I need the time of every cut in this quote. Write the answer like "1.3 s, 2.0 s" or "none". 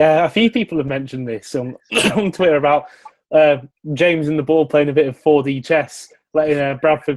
none